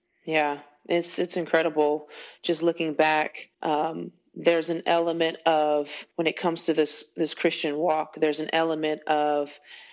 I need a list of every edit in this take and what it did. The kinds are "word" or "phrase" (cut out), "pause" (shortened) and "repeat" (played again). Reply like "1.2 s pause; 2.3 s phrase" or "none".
3.5 s pause; 6.1 s pause

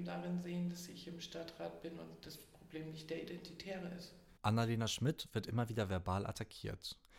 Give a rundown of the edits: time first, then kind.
4.4 s pause

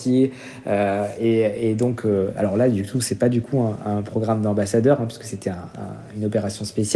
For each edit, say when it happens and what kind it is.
none

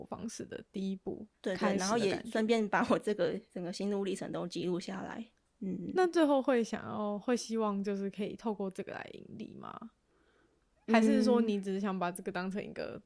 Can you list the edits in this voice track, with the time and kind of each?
1.3 s pause; 5.5 s pause

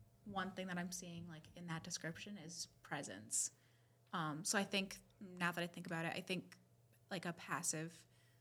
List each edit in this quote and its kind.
none

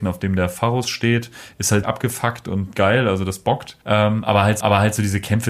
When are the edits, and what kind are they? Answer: 1.8 s word; 2.7 s word; 3.8 s pause; 4.6 s repeat

